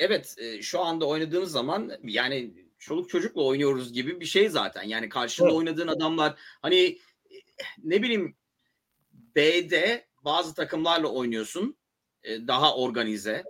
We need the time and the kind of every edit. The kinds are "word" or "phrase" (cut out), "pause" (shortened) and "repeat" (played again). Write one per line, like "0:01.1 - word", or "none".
0:02.0 - word
0:02.7 - pause